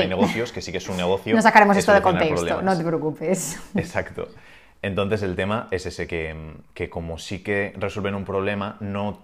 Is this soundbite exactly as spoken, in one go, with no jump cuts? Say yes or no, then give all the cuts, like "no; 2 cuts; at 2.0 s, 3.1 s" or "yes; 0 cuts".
yes; 0 cuts